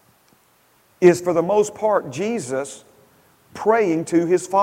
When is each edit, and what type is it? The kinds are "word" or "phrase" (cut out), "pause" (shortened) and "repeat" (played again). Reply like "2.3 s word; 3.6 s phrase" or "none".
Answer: none